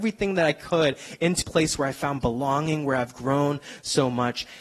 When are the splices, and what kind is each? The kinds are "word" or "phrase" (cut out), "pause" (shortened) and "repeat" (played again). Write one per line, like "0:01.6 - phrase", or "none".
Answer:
0:01.4 - word